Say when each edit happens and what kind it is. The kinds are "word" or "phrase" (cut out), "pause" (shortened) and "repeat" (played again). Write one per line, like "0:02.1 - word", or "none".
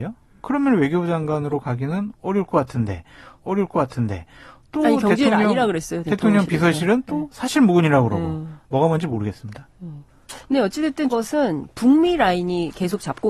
0:03.4 - repeat
0:08.6 - pause
0:11.1 - word